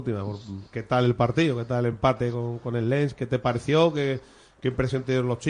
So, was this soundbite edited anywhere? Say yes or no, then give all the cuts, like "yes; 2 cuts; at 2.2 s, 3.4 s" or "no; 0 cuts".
no; 0 cuts